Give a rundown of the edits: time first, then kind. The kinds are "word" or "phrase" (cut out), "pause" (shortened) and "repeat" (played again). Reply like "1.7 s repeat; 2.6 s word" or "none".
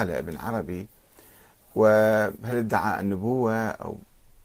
none